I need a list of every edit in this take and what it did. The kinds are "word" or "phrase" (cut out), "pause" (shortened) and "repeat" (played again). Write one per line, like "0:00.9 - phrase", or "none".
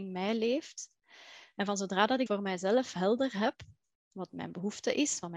0:02.3 - word
0:03.8 - pause